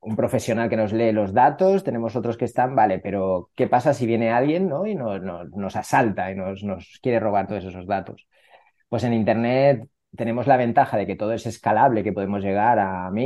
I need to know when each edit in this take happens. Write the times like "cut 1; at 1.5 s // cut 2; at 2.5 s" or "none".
none

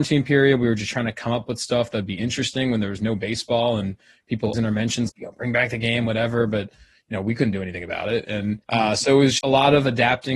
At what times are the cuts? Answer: cut 1; at 4.5 s // cut 2; at 5.1 s // cut 3; at 8.6 s // cut 4; at 9.4 s

